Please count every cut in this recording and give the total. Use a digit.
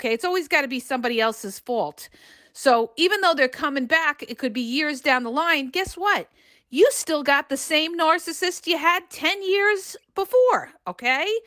0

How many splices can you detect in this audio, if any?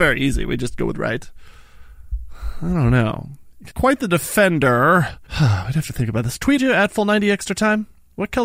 4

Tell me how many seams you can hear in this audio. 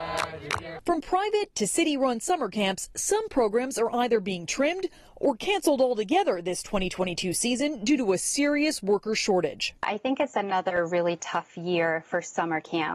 0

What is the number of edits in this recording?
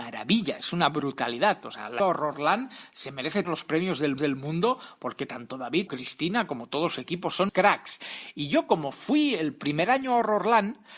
5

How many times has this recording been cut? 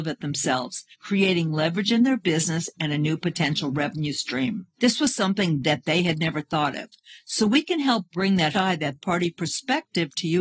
4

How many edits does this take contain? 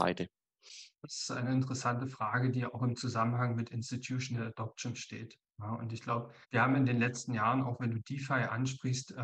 2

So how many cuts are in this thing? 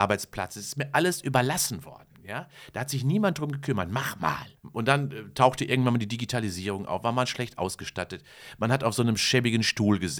1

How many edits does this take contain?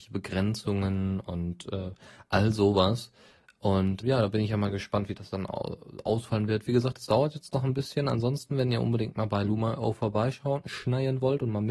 1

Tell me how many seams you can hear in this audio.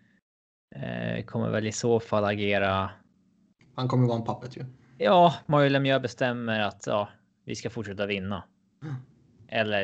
0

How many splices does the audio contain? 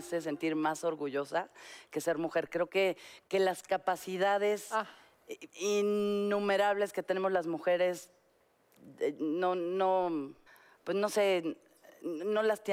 2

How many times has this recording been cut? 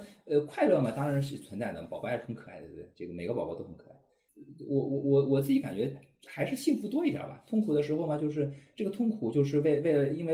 0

